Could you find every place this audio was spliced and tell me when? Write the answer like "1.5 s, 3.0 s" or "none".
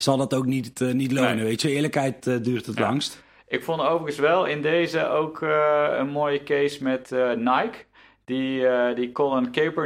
none